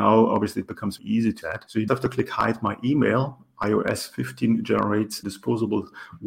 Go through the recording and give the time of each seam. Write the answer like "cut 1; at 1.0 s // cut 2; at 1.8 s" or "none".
cut 1; at 1.0 s // cut 2; at 1.4 s // cut 3; at 1.9 s // cut 4; at 5.2 s